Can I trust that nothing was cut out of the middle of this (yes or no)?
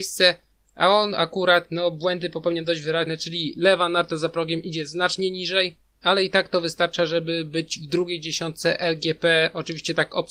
yes